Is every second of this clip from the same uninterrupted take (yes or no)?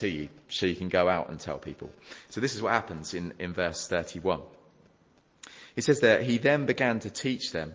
yes